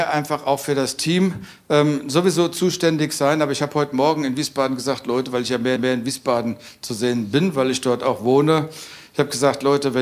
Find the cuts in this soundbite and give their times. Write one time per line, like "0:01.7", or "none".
0:05.8